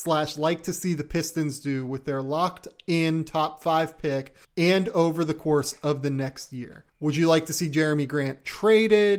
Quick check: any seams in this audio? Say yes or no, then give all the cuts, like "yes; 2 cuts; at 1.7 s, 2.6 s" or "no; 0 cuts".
yes; 2 cuts; at 4.4 s, 6.9 s